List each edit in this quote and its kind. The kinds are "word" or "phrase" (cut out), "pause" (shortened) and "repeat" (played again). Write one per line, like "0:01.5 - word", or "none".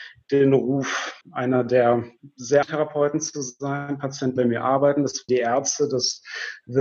0:01.2 - pause
0:02.6 - word
0:04.4 - word
0:05.3 - word